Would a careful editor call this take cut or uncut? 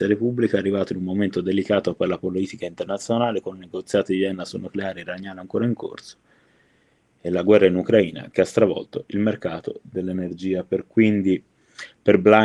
uncut